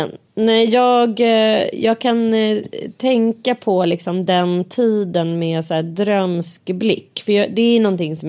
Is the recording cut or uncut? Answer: uncut